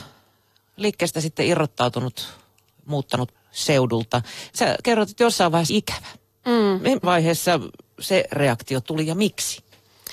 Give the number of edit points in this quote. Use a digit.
4